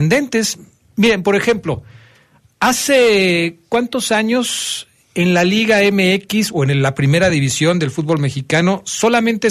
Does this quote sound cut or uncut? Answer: uncut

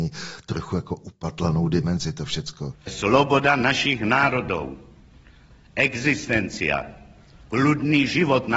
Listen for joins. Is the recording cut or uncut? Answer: uncut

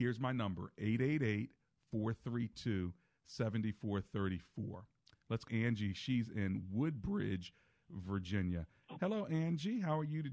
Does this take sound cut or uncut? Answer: cut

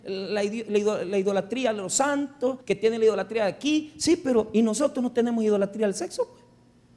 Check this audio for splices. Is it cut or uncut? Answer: cut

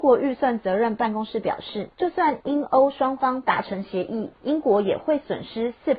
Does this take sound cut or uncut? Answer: cut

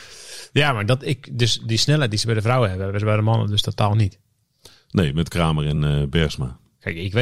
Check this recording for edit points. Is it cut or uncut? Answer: uncut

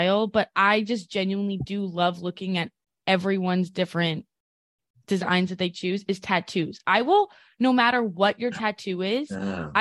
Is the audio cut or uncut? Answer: uncut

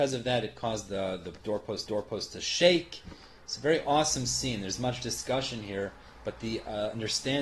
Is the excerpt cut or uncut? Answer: cut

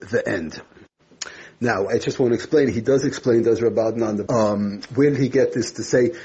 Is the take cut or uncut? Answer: cut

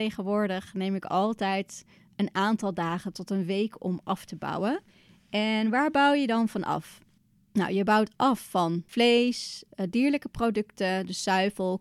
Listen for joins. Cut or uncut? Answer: uncut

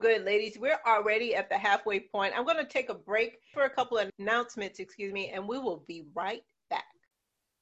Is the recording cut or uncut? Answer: cut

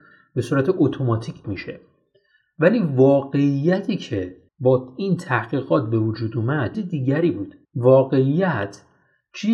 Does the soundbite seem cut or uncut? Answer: cut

